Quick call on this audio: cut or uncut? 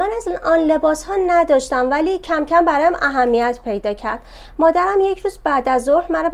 uncut